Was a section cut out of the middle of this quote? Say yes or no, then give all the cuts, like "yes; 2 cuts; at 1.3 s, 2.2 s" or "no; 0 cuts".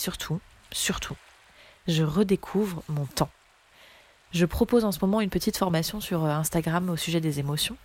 no; 0 cuts